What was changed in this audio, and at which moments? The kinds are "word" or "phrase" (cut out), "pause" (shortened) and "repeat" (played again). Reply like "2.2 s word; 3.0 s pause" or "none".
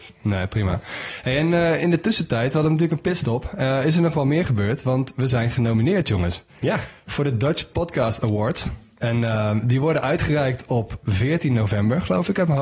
none